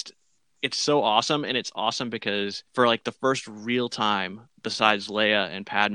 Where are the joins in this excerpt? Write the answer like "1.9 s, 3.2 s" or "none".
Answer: 2.7 s